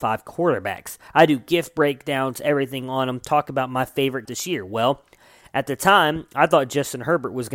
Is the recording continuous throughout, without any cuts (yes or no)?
no